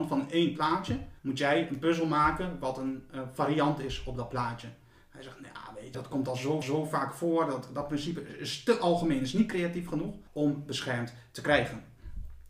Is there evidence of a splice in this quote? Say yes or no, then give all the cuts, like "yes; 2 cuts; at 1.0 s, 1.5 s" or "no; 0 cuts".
yes; 4 cuts; at 1.2 s, 5.9 s, 6.6 s, 10.3 s